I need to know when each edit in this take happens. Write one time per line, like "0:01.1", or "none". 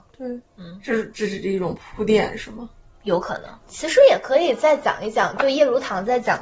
0:03.6